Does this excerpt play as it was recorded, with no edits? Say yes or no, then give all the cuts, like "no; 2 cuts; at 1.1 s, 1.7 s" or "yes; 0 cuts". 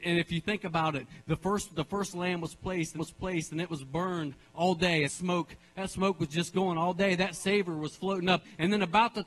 no; 3 cuts; at 3.0 s, 5.0 s, 6.9 s